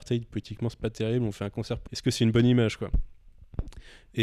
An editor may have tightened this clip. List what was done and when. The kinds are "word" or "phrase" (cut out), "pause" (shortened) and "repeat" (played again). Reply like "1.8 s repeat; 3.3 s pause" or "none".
1.9 s word